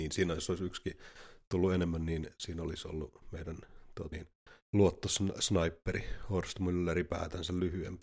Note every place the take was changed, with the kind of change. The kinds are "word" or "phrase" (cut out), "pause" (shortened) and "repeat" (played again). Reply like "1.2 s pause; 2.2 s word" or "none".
4.1 s word; 4.6 s pause